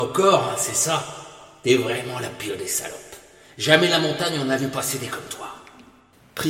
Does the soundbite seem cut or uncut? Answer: uncut